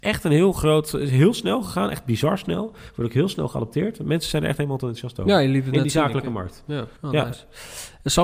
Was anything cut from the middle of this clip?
yes; 1 cut; at 7.0 s

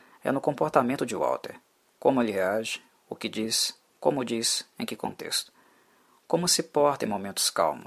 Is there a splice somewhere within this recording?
no; 0 cuts

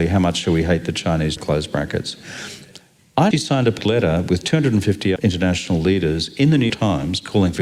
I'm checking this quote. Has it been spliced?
yes; 5 cuts; at 1.4 s, 3.3 s, 3.8 s, 5.2 s, 6.7 s

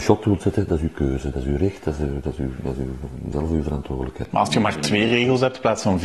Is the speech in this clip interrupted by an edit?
no; 0 cuts

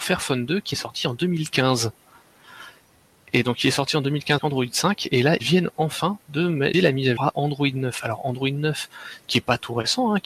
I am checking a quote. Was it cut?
yes; 4 cuts; at 4.4 s, 5.4 s, 6.7 s, 7.2 s

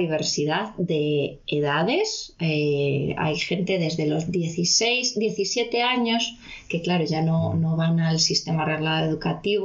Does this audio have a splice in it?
no; 0 cuts

